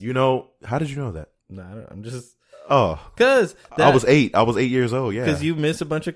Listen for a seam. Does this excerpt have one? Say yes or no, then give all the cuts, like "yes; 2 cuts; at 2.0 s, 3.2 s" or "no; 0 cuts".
yes; 1 cut; at 1.4 s